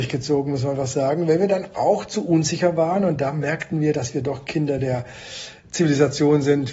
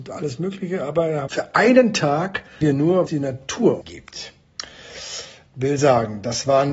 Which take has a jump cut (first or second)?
second